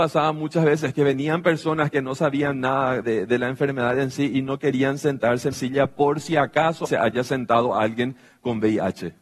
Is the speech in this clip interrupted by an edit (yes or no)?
yes